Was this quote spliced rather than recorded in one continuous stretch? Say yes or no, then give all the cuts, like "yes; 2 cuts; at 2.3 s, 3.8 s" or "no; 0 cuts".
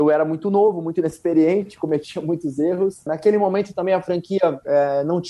no; 0 cuts